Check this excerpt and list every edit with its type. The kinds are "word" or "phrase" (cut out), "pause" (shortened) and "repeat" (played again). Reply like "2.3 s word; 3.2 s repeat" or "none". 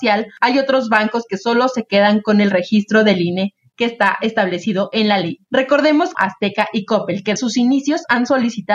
6.1 s phrase; 7.4 s word